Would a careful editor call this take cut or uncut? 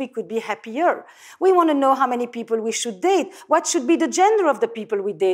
uncut